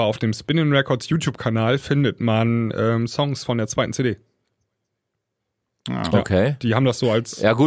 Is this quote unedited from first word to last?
yes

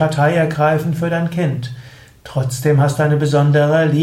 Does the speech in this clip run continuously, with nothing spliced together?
yes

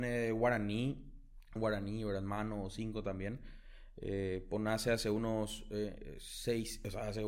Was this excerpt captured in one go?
no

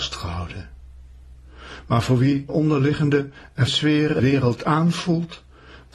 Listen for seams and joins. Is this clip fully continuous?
no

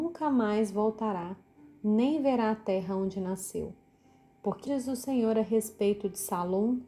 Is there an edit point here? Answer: yes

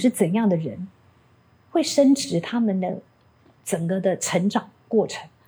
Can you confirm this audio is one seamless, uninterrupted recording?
yes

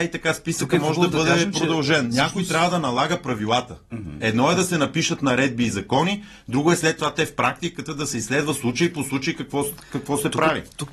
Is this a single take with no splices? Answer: yes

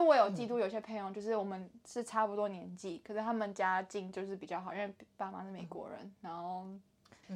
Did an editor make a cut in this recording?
no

